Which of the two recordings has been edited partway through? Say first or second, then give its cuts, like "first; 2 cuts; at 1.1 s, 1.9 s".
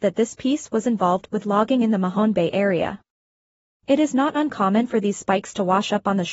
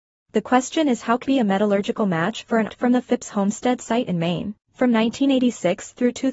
second; 3 cuts; at 1.2 s, 2.7 s, 4.6 s